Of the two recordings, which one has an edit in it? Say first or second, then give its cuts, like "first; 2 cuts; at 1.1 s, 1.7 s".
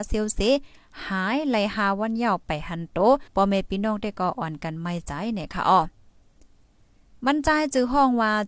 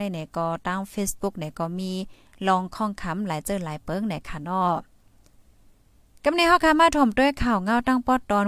first; 1 cut; at 3.3 s